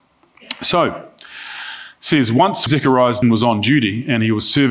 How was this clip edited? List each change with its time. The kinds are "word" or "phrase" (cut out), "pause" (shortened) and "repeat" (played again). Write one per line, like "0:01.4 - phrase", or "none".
0:02.7 - word
0:03.2 - word